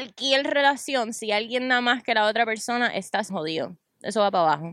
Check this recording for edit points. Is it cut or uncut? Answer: cut